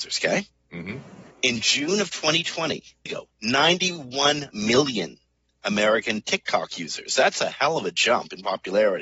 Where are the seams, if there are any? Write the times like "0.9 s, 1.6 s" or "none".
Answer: 1.3 s, 3.1 s